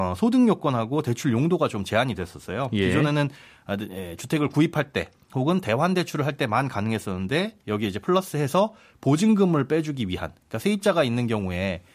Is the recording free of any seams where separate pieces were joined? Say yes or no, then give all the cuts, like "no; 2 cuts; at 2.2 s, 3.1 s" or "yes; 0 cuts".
yes; 0 cuts